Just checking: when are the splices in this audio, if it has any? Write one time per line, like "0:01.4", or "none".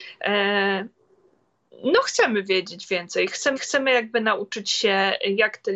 0:03.6